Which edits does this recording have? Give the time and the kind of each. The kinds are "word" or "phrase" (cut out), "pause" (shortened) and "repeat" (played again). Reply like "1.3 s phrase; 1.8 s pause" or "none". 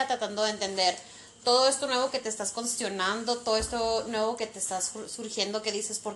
none